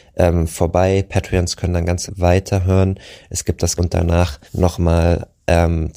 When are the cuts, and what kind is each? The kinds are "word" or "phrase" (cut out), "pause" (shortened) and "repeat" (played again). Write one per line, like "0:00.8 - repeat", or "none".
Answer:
0:02.1 - word
0:03.8 - word
0:04.5 - pause